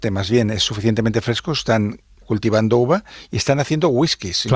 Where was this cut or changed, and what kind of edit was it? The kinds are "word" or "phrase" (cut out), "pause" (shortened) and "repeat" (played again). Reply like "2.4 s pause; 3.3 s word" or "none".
2.2 s word